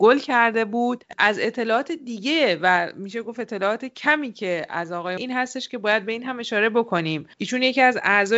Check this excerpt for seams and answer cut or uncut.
cut